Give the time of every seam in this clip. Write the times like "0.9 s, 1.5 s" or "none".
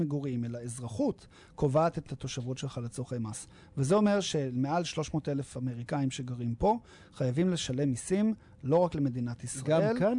none